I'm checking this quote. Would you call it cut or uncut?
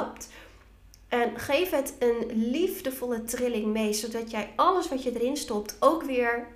uncut